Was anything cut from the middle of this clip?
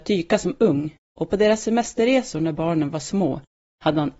no; 0 cuts

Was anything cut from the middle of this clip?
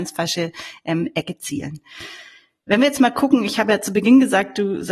no; 0 cuts

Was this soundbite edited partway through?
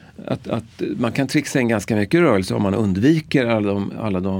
no; 0 cuts

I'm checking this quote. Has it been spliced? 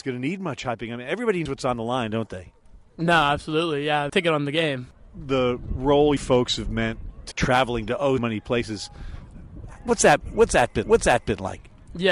yes; 6 cuts; at 1.5 s, 4.1 s, 6.2 s, 7.3 s, 8.2 s, 10.8 s

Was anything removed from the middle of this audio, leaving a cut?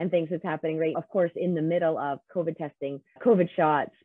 yes; 2 cuts; at 0.9 s, 3.2 s

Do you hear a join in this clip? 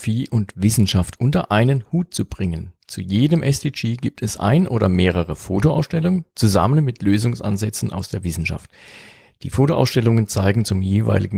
no; 0 cuts

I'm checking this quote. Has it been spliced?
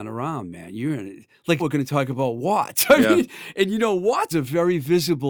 yes; 2 cuts; at 1.6 s, 4.3 s

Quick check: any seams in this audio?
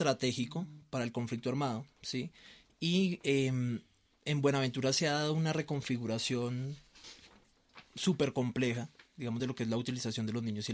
no; 0 cuts

